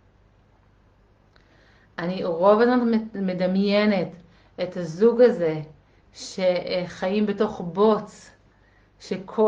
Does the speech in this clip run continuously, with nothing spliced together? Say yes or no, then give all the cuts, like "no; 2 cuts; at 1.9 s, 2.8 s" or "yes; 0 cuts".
yes; 0 cuts